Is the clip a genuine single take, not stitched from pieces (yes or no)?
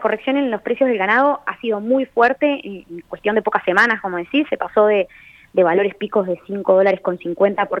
yes